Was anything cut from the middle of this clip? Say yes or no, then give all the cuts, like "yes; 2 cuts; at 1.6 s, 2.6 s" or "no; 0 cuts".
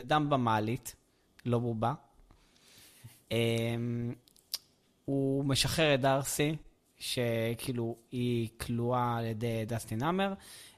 no; 0 cuts